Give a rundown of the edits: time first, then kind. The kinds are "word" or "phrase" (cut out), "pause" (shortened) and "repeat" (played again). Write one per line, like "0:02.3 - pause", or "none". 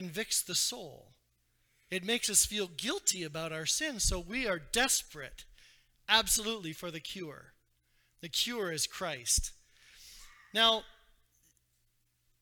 none